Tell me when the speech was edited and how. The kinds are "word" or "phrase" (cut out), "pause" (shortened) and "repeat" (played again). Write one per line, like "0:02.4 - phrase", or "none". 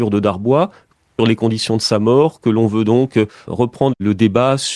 0:01.2 - phrase